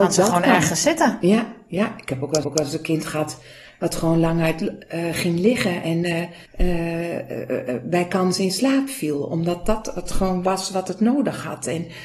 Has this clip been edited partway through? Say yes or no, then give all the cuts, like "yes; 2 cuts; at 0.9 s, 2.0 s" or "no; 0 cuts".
yes; 2 cuts; at 2.4 s, 6.5 s